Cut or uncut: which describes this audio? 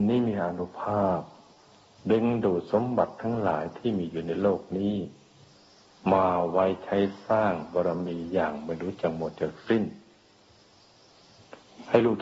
uncut